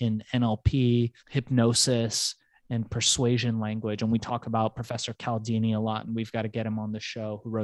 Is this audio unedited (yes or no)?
no